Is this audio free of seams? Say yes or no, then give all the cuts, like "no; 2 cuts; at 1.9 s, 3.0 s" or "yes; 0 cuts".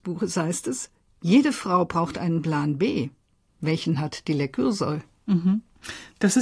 yes; 0 cuts